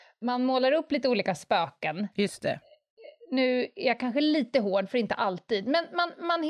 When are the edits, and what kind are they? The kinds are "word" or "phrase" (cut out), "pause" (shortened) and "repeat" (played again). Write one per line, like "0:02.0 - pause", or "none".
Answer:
0:02.1 - pause
0:03.2 - pause